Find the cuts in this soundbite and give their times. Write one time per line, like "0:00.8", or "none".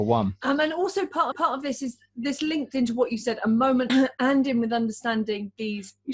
0:01.3
0:03.9